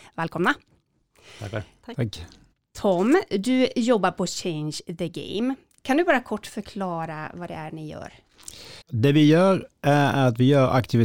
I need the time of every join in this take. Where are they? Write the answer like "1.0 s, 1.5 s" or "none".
2.5 s, 8.8 s